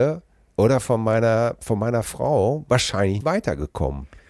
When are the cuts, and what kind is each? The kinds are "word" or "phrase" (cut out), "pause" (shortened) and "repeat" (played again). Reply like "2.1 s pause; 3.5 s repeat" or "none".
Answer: 3.2 s word